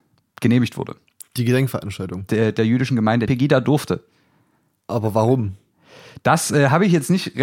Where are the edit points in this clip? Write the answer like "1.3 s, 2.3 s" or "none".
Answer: 3.3 s